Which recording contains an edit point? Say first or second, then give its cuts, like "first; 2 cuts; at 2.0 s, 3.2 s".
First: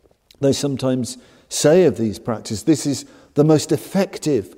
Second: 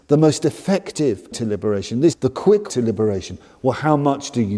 second; 3 cuts; at 1.3 s, 2.1 s, 2.7 s